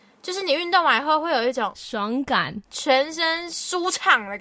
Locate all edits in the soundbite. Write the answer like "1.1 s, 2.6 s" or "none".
2.6 s